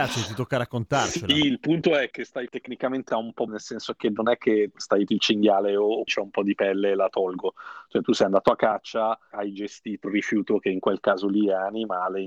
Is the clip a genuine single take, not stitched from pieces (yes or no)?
no